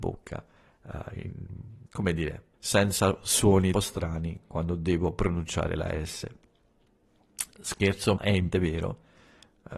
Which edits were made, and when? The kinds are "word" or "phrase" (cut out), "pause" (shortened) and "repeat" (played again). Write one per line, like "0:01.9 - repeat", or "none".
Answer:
0:01.9 - pause
0:02.5 - pause
0:03.7 - word
0:08.2 - word
0:08.5 - word